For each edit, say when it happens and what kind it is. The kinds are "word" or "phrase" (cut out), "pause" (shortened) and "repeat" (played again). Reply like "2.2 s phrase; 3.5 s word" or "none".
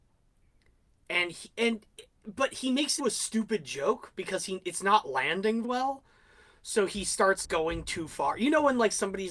3.0 s word; 5.6 s word; 7.4 s word

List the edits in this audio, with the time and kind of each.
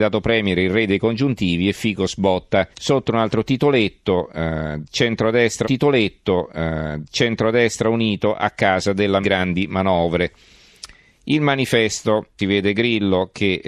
2.7 s pause; 5.6 s repeat; 9.2 s word; 12.4 s phrase

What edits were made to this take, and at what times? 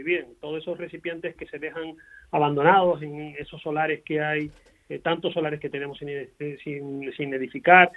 1.4 s word

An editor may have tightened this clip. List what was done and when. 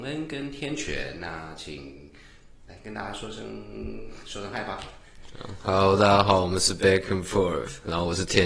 none

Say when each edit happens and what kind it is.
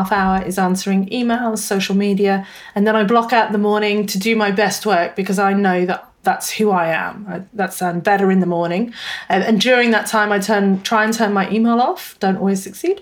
none

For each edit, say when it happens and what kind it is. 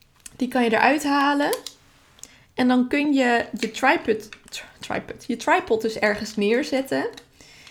none

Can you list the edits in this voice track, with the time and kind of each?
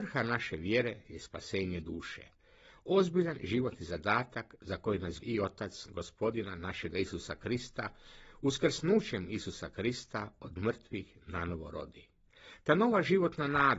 5.2 s word

